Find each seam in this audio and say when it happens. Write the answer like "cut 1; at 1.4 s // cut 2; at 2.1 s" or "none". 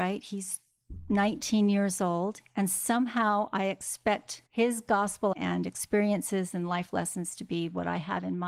cut 1; at 4.5 s // cut 2; at 5.3 s